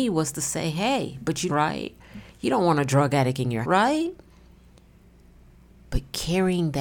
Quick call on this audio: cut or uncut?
cut